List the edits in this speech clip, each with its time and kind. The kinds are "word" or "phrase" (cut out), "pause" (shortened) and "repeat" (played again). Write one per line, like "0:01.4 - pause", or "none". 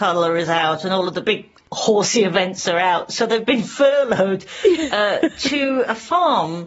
none